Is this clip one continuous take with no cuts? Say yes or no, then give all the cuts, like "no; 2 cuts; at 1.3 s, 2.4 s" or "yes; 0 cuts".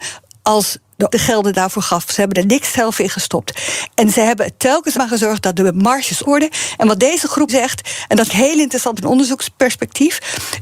no; 7 cuts; at 1.1 s, 2.3 s, 4.9 s, 6.2 s, 7.5 s, 8.3 s, 9.0 s